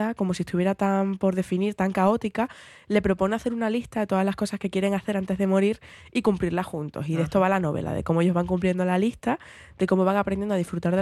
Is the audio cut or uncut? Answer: uncut